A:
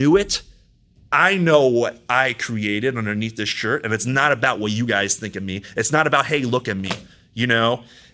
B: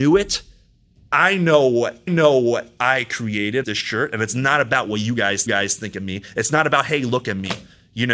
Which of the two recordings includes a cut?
B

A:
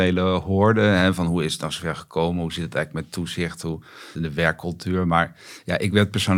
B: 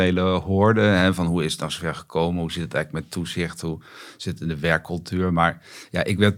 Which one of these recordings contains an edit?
A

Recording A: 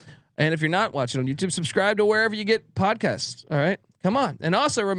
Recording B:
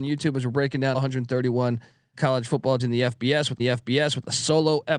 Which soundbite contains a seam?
B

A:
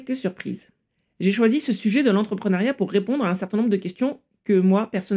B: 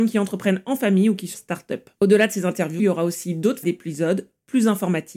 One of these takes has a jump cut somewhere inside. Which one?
B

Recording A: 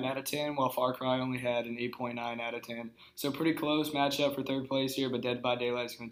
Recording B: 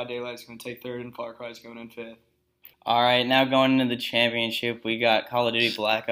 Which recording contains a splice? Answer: B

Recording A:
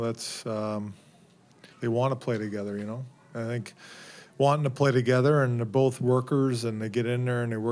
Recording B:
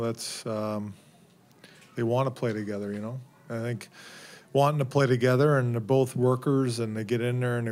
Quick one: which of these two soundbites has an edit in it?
A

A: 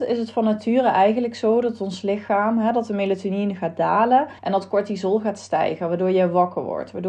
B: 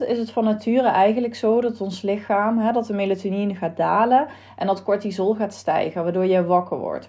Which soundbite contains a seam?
A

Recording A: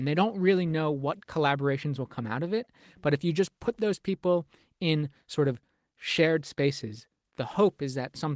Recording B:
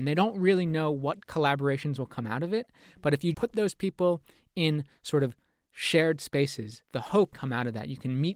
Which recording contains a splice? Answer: B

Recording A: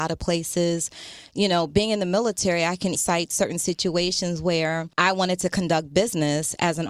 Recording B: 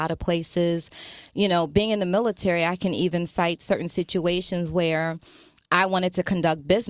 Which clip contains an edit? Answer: A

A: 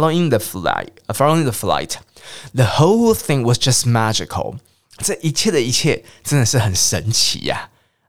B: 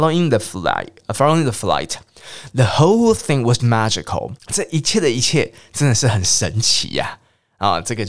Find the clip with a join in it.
B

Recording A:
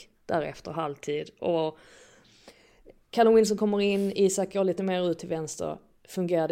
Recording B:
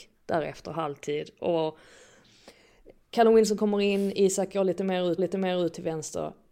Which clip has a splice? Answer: B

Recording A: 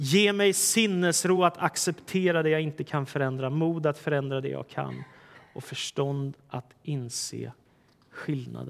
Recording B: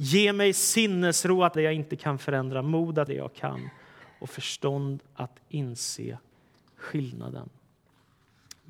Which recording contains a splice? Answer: B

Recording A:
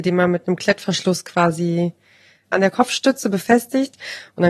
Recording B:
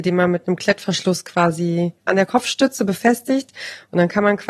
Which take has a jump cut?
B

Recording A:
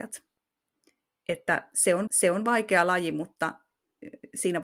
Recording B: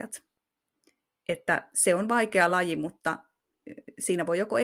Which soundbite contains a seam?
A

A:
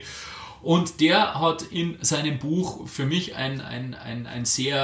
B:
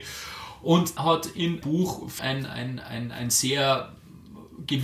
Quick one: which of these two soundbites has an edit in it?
B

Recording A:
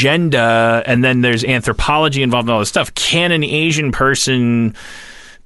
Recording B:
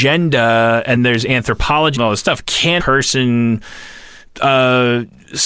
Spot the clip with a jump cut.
B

